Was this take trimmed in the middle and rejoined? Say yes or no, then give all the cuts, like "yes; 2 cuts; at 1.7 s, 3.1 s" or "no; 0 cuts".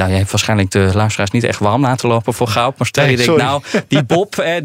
no; 0 cuts